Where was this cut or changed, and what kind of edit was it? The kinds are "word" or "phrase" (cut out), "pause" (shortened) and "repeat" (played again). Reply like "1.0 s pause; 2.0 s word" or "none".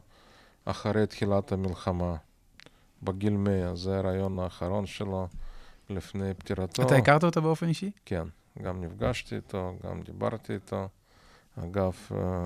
none

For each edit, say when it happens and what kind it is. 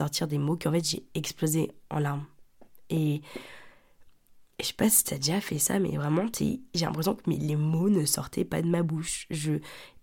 none

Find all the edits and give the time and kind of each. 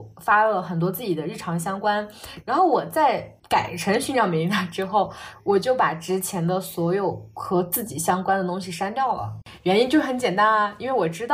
3.4 s pause

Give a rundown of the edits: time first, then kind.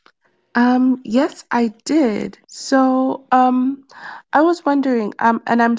2.4 s pause

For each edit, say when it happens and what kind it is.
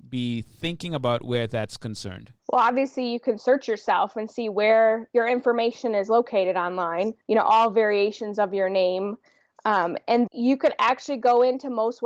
2.4 s pause; 7.2 s pause; 10.3 s word

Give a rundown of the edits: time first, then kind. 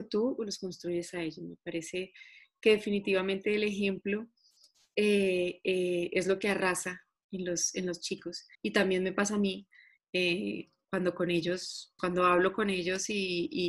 8.5 s pause; 10.8 s word; 12.0 s word

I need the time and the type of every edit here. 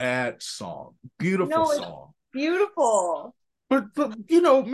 2.2 s pause

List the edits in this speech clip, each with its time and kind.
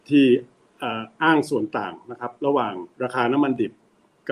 2.9 s pause

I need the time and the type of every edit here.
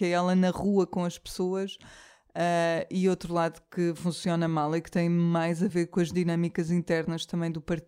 none

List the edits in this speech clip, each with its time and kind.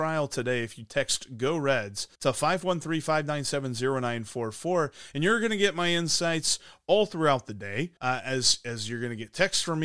2.1 s pause; 8.0 s pause

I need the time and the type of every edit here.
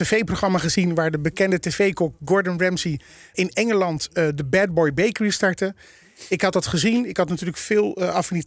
3.3 s word

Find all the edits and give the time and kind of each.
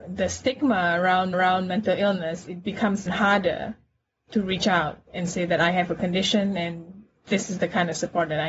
1.3 s repeat; 3.1 s word

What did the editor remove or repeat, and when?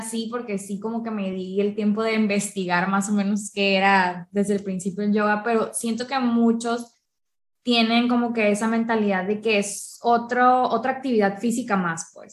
none

